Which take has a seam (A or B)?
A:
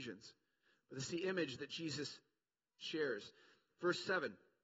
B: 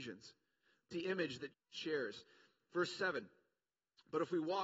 B